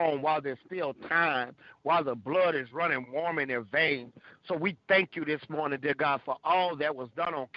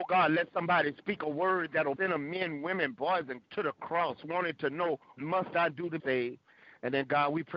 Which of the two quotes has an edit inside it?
second; 4 cuts; at 2.0 s, 3.4 s, 5.2 s, 6.0 s

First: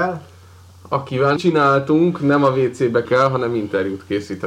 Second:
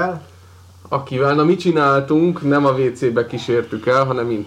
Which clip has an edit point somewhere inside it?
first; 2 cuts; at 1.4 s, 3.0 s

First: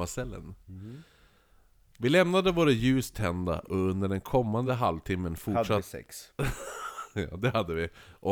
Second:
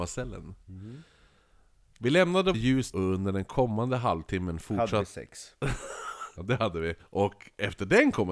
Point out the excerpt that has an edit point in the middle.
second; 4 cuts; at 2.5 s, 2.9 s, 6.4 s, 7.0 s

